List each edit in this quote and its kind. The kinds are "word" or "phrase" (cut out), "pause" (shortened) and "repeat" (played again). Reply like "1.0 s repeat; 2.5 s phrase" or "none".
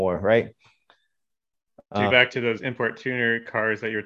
2.1 s word